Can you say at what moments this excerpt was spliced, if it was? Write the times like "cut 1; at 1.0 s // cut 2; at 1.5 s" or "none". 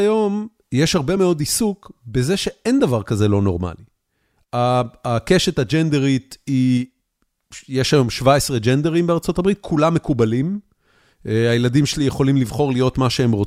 none